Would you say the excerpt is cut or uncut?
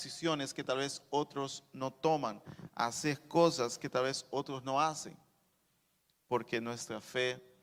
uncut